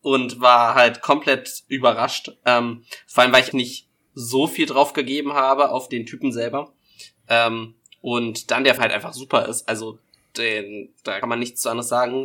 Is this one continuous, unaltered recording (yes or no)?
no